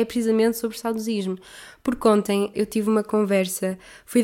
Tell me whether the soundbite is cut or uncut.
cut